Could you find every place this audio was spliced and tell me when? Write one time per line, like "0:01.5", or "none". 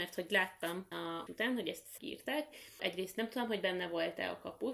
0:00.9
0:01.3
0:02.0
0:02.8